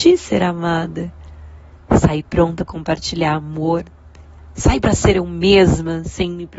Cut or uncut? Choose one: cut